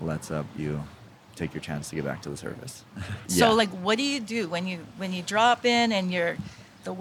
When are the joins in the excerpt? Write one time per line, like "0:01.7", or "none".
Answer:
none

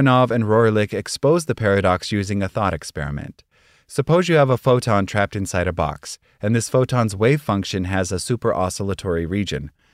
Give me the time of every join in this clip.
none

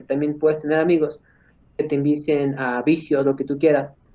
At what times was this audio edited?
none

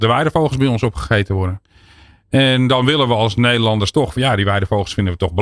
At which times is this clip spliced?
none

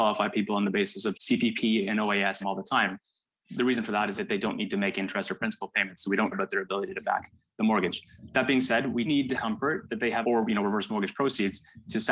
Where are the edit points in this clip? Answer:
0:01.1
0:02.4
0:04.2
0:06.3
0:07.0
0:09.0
0:09.3
0:10.2

